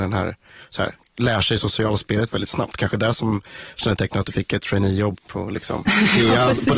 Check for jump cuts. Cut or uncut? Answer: cut